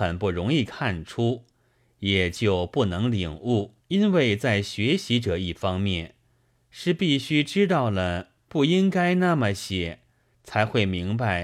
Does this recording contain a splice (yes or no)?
yes